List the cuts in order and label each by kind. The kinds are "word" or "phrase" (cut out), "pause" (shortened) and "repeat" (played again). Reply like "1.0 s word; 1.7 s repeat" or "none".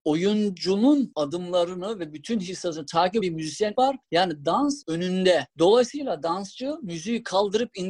3.2 s word; 3.7 s word; 4.8 s word

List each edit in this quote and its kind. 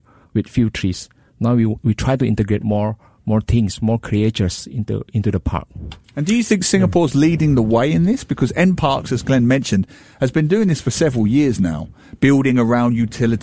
none

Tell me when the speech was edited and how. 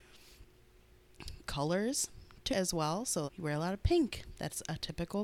1.4 s phrase; 2.5 s word; 3.3 s word

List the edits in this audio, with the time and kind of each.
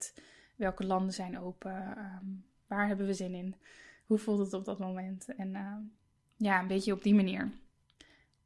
none

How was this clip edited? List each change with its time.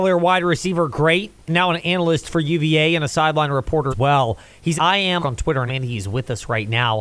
3.9 s word; 4.8 s word; 5.2 s word; 5.7 s word

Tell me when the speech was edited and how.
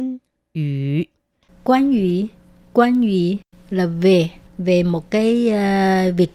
1.3 s pause; 4.5 s pause

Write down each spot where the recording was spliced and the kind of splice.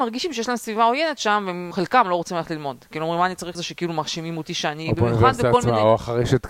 1.7 s word; 3.5 s phrase

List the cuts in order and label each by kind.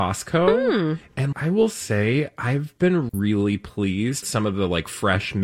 1.3 s word; 3.1 s word; 4.2 s word

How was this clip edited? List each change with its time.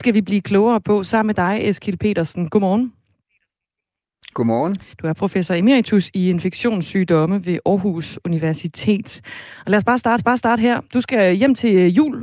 4.9 s pause; 10.2 s repeat

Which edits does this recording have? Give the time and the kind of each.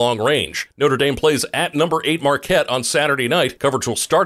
none

